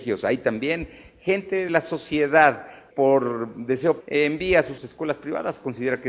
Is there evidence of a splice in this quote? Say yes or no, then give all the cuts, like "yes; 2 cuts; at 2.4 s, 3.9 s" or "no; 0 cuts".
yes; 4 cuts; at 1.7 s, 2.9 s, 4.0 s, 4.8 s